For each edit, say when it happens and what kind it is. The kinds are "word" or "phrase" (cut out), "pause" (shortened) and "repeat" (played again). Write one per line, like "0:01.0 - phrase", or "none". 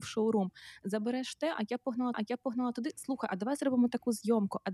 0:02.1 - repeat